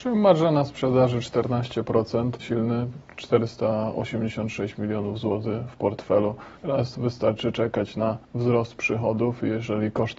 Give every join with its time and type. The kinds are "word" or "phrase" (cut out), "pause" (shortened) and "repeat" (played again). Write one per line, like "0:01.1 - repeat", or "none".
0:02.4 - word
0:06.6 - pause
0:08.2 - pause